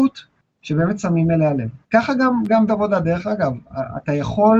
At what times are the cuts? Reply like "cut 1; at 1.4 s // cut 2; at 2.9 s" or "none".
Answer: cut 1; at 1.8 s // cut 2; at 2.7 s

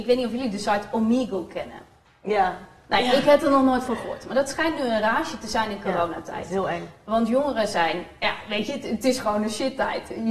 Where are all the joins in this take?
none

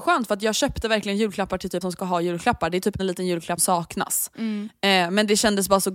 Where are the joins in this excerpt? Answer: cut 1; at 1.8 s // cut 2; at 3.0 s // cut 3; at 3.6 s

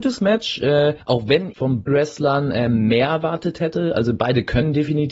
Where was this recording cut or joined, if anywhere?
cut 1; at 1.0 s // cut 2; at 1.5 s // cut 3; at 1.9 s

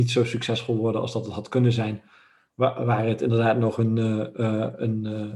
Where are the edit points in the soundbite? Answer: none

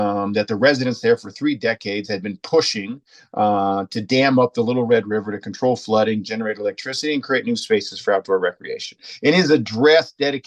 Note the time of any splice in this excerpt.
none

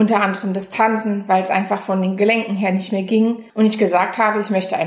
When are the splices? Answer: cut 1; at 3.5 s

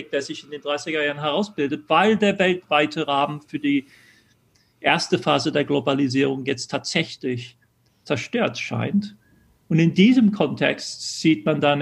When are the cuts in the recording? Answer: none

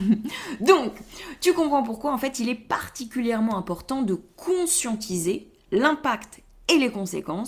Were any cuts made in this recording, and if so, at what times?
none

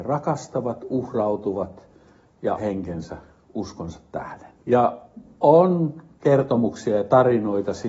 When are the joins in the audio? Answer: cut 1; at 2.6 s // cut 2; at 4.6 s

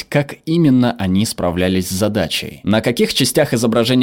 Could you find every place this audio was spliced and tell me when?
none

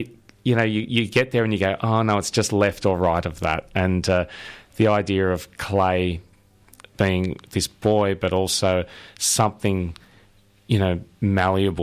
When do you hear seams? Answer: none

